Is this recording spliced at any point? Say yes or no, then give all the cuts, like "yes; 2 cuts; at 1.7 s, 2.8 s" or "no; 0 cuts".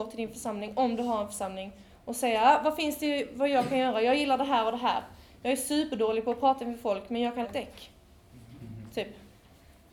yes; 1 cut; at 7.4 s